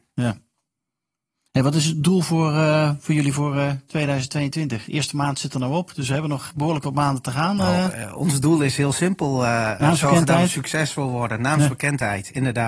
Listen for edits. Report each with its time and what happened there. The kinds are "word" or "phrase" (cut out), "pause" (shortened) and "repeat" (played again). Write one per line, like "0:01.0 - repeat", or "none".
0:06.5 - word